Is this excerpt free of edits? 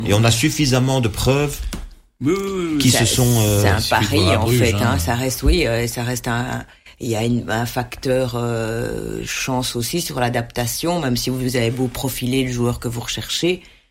yes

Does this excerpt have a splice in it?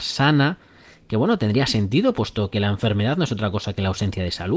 no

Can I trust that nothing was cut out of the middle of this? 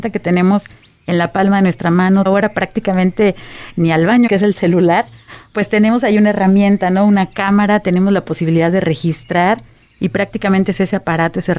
no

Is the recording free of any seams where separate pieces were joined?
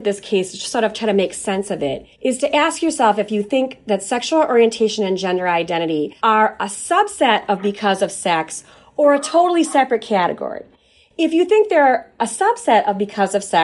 no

